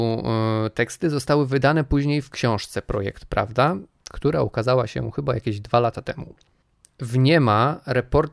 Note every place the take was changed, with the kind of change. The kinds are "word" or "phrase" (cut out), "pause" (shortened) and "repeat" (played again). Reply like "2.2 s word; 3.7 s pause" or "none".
none